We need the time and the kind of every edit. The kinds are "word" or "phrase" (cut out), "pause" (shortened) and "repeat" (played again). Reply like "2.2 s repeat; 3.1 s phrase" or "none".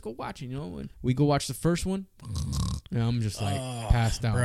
0.9 s pause